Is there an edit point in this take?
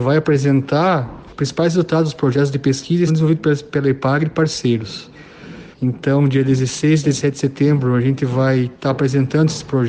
yes; 3 cuts; at 1.3 s, 3.1 s, 5.7 s

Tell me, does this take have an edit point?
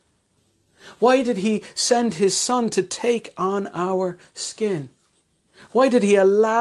no; 0 cuts

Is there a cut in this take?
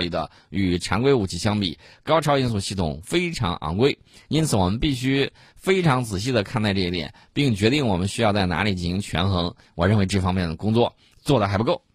no; 0 cuts

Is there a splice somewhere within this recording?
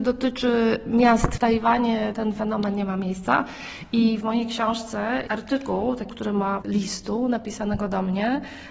yes; 6 cuts; at 1.4 s, 2.1 s, 4.2 s, 5.3 s, 6.1 s, 6.6 s

